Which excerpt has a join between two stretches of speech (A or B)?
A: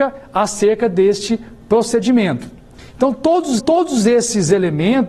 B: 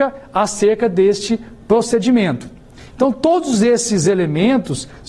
A